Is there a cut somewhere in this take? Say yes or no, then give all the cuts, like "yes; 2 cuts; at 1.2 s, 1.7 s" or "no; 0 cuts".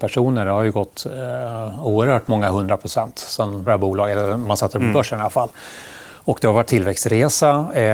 yes; 2 cuts; at 3.7 s, 6.7 s